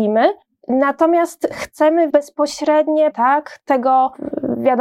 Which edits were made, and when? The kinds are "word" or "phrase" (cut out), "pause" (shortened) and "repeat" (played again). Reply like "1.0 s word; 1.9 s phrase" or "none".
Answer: 2.1 s word; 3.1 s word

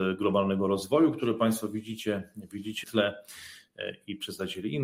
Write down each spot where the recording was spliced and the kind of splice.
2.8 s word

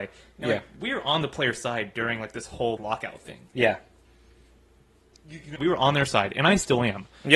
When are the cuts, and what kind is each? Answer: 2.8 s word; 5.6 s word

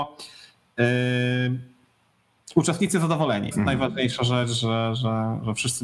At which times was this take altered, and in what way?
3.5 s phrase

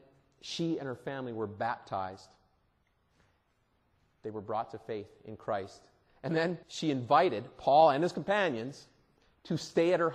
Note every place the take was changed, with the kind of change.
6.6 s pause

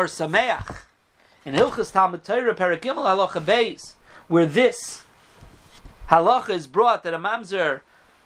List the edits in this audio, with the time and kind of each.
none

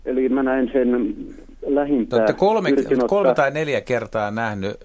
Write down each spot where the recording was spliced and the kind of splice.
none

